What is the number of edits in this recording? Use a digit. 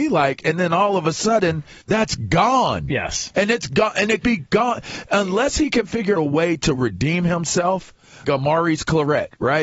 5